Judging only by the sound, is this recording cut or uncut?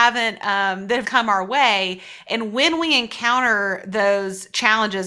cut